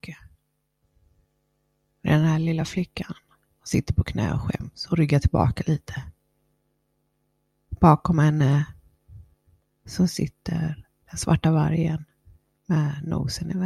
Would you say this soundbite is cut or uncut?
uncut